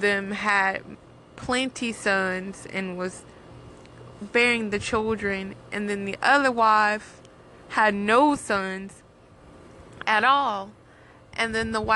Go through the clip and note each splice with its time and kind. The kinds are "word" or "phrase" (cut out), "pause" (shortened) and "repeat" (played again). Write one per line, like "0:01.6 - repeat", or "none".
none